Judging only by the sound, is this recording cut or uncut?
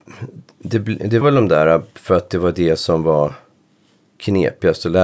cut